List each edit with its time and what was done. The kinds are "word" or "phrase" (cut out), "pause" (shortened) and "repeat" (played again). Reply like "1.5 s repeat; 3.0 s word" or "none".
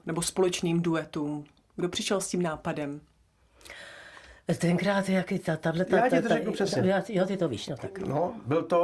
none